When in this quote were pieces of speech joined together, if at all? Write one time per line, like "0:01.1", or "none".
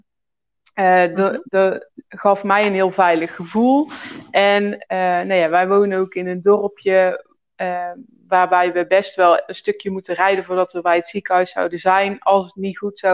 none